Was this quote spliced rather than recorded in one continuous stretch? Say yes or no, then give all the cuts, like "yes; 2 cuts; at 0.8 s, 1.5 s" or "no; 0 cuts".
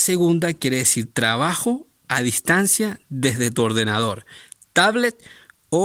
no; 0 cuts